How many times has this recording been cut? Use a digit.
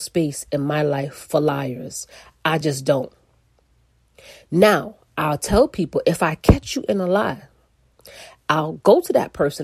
0